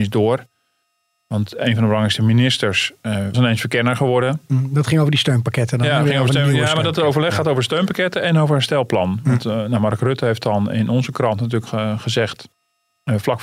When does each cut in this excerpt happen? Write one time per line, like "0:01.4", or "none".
0:03.3
0:11.7

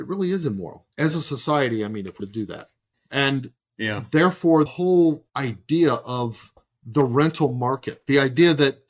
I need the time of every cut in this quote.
0:00.9
0:02.2
0:02.9
0:04.7
0:05.3
0:06.6

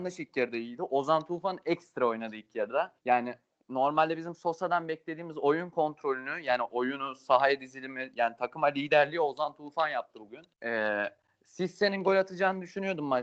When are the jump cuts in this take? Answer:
0:03.0
0:10.5

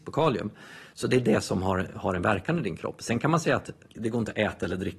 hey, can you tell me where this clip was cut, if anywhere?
none

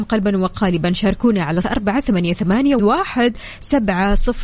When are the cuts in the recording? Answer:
0:01.6
0:02.8

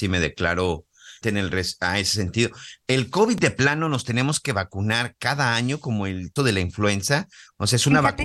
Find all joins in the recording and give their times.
0:01.2
0:06.4

